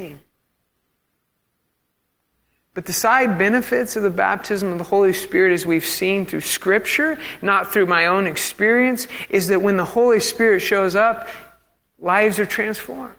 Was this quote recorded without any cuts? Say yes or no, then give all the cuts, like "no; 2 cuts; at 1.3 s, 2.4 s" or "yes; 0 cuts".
yes; 0 cuts